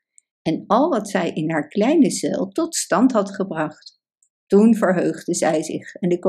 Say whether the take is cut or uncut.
uncut